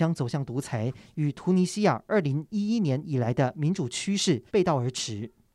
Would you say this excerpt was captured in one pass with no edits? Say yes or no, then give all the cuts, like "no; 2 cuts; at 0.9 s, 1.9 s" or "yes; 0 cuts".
no; 1 cut; at 4.5 s